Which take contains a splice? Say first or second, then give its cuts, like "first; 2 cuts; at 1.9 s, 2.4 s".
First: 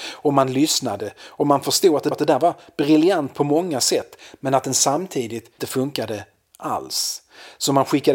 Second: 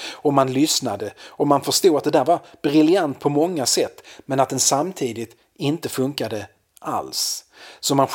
first; 2 cuts; at 2.1 s, 5.6 s